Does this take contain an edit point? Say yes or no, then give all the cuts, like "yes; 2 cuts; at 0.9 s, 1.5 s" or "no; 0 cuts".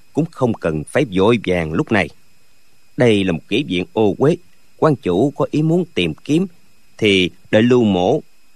no; 0 cuts